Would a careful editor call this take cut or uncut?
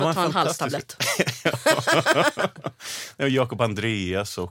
uncut